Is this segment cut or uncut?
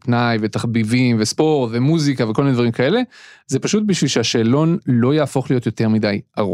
uncut